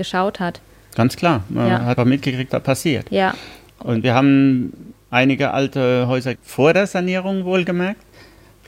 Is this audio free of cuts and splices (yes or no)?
no